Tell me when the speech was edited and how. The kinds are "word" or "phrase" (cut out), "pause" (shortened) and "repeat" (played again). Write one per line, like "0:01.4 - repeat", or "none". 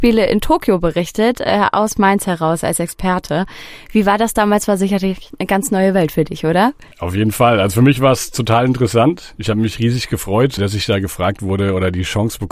0:06.9 - pause
0:10.6 - word